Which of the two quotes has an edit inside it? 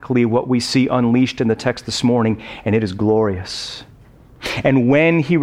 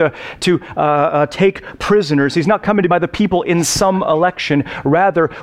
second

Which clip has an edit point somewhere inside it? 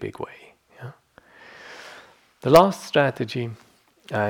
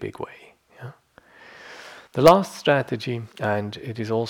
second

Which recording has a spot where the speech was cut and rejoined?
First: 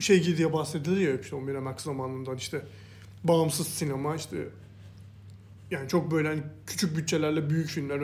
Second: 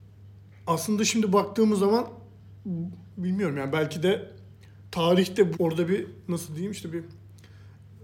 second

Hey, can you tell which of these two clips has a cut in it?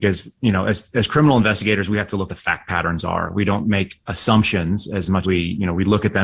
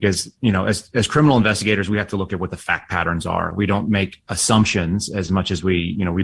first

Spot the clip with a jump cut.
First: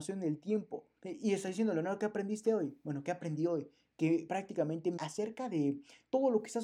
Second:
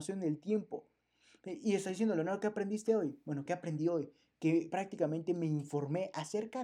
first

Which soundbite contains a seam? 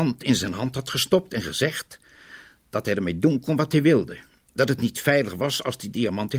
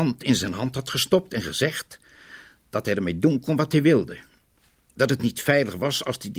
first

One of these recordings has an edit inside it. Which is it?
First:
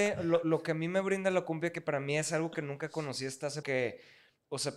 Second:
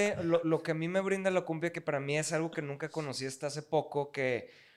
first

